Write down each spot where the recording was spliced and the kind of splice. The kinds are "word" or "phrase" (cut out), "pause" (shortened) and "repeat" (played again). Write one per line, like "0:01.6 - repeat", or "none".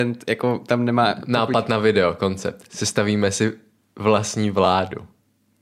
none